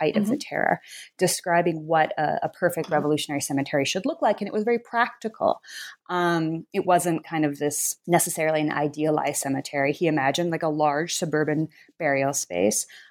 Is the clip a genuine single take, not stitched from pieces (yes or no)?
yes